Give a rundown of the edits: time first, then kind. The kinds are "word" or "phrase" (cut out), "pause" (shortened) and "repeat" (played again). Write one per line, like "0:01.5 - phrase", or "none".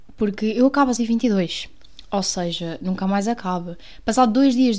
0:01.0 - word